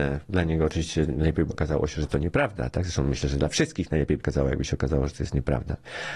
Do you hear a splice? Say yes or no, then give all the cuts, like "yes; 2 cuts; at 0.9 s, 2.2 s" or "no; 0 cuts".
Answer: yes; 2 cuts; at 1.5 s, 4.2 s